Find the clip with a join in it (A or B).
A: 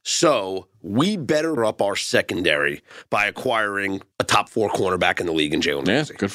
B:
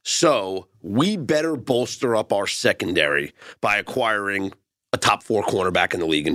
A